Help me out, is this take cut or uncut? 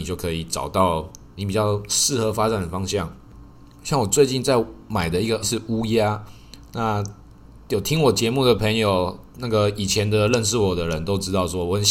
cut